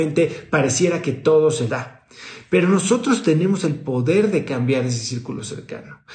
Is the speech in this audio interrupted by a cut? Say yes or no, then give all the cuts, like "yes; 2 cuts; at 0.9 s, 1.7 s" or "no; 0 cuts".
yes; 1 cut; at 1.7 s